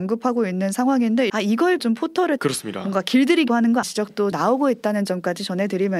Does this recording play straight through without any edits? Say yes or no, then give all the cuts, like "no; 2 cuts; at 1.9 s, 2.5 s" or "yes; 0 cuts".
no; 6 cuts; at 1.3 s, 1.8 s, 2.4 s, 3.5 s, 3.8 s, 4.3 s